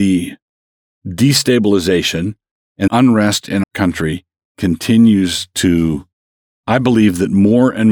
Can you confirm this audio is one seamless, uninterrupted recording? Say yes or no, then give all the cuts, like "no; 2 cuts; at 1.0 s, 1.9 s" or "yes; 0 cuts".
no; 3 cuts; at 2.9 s, 3.6 s, 6.5 s